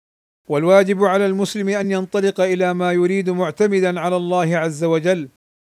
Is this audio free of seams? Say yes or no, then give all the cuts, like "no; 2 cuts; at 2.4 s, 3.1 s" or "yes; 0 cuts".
yes; 0 cuts